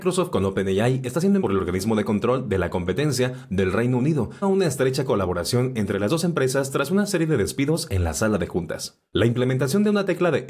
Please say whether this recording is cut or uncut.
cut